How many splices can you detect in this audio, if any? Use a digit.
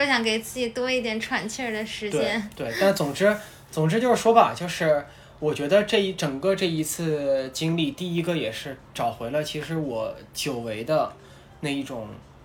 0